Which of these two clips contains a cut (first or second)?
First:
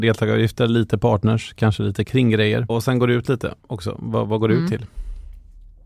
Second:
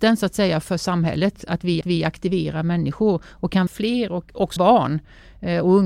second